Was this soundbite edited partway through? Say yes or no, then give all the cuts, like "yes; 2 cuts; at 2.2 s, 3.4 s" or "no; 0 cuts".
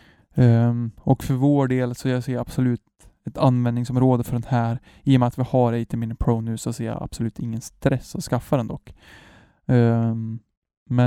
no; 0 cuts